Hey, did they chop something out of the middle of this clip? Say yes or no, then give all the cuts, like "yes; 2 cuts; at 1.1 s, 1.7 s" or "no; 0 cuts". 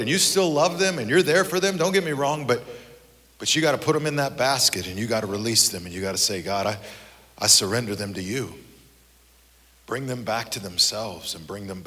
no; 0 cuts